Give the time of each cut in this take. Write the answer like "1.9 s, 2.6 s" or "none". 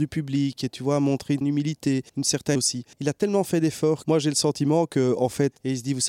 1.4 s, 2.1 s, 2.5 s, 2.9 s, 4.0 s

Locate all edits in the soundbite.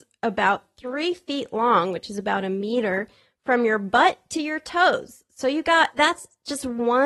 none

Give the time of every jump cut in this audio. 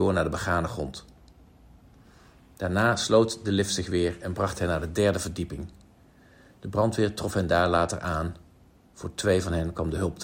none

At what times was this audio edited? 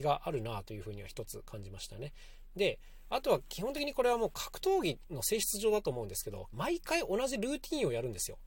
6.5 s

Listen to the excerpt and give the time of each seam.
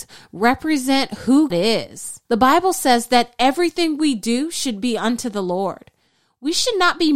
1.5 s, 2.2 s

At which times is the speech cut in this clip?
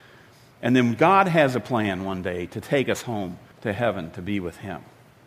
3.5 s

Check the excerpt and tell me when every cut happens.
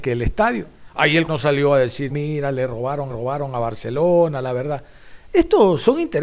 1.3 s, 2.1 s, 3.1 s

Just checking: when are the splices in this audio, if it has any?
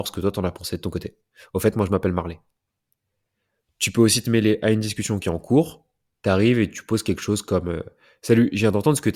none

